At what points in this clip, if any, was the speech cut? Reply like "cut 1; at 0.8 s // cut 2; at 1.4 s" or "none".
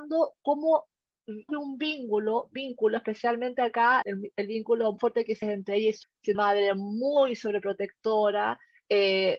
cut 1; at 1.5 s // cut 2; at 4.0 s // cut 3; at 5.0 s // cut 4; at 5.4 s // cut 5; at 6.0 s // cut 6; at 6.3 s